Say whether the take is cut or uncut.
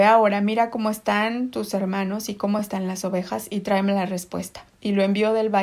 uncut